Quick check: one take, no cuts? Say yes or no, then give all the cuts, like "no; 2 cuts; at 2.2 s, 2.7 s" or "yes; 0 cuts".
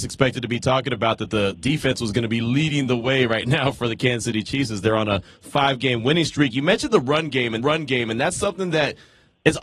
no; 1 cut; at 7.6 s